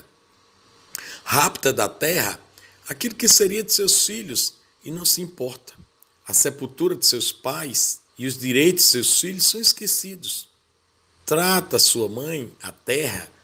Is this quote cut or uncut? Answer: cut